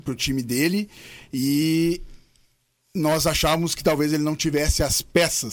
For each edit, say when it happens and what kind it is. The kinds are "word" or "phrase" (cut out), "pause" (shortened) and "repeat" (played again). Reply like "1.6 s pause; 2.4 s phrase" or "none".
none